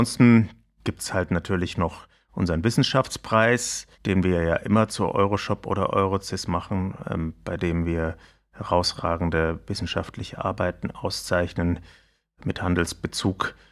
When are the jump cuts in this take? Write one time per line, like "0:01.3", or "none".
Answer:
0:03.9